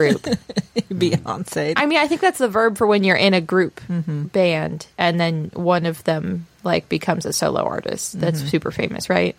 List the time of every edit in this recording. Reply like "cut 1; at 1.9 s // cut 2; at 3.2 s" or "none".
cut 1; at 4.9 s // cut 2; at 6.5 s